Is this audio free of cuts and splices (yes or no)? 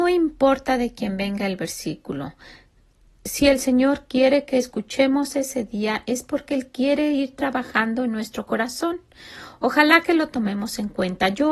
yes